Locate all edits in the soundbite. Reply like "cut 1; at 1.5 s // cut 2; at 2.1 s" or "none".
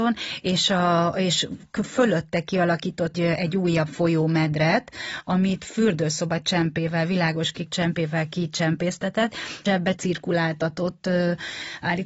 cut 1; at 3.1 s // cut 2; at 7.7 s // cut 3; at 9.7 s // cut 4; at 10.0 s